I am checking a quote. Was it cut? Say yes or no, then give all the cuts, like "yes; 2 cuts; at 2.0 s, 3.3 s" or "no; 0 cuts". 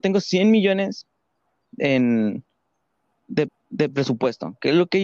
yes; 1 cut; at 3.5 s